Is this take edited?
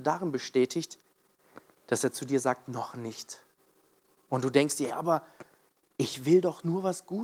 yes; 1 cut; at 4.9 s

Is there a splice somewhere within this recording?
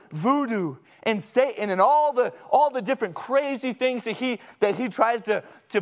no; 0 cuts

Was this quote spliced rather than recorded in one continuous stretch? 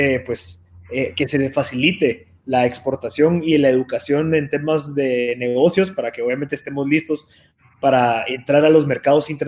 no; 0 cuts

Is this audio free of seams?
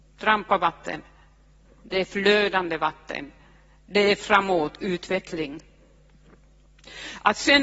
yes; 0 cuts

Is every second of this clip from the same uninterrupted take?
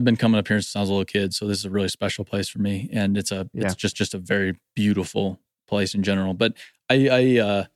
no; 1 cut; at 3.9 s

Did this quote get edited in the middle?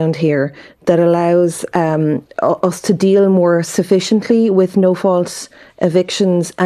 no; 0 cuts

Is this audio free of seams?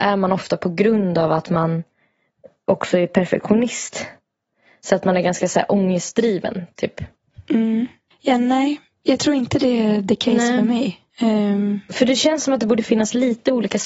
no; 1 cut; at 11.1 s

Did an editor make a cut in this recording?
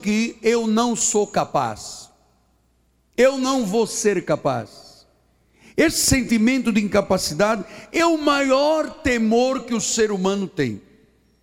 no; 0 cuts

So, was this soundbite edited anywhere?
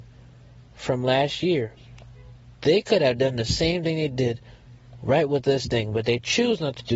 no; 0 cuts

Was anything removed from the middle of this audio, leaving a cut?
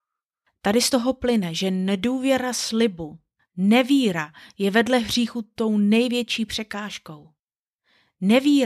no; 0 cuts

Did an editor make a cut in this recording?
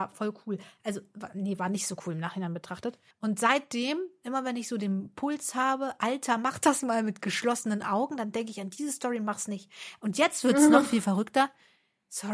yes; 1 cut; at 3.1 s

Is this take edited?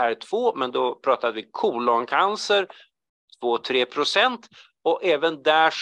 no; 0 cuts

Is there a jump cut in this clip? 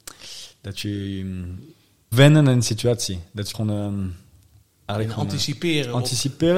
yes; 2 cuts; at 2.1 s, 3.5 s

